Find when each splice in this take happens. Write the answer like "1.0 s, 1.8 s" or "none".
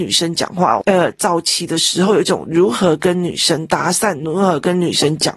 none